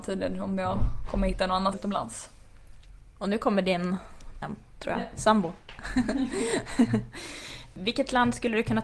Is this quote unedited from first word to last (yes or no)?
no